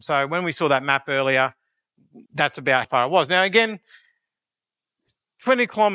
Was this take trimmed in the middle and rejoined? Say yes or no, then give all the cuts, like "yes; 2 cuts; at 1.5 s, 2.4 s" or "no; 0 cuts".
yes; 2 cuts; at 2.3 s, 2.8 s